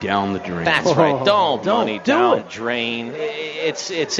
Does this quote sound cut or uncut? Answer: cut